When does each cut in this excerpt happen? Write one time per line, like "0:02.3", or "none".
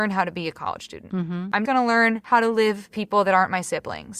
0:01.6
0:02.9